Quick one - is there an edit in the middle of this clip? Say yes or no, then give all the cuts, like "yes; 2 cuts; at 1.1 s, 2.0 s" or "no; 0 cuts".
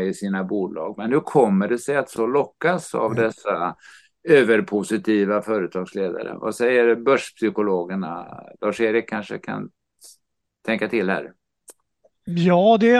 yes; 1 cut; at 2.2 s